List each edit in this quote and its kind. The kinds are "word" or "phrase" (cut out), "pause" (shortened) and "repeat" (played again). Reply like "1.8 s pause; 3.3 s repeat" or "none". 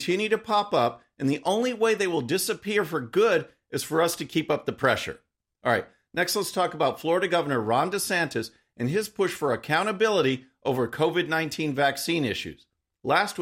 none